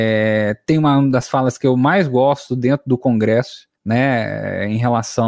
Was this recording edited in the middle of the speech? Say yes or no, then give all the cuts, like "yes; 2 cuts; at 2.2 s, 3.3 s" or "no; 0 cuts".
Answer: yes; 1 cut; at 3.8 s